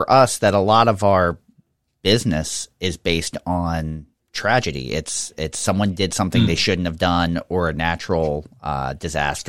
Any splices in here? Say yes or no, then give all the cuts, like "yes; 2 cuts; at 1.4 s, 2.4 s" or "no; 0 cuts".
no; 0 cuts